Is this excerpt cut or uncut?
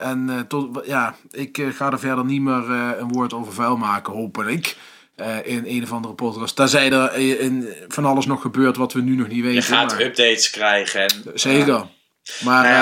uncut